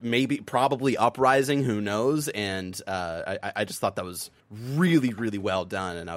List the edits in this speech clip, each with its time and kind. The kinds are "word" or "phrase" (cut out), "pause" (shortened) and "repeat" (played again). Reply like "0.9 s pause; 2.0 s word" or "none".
4.4 s pause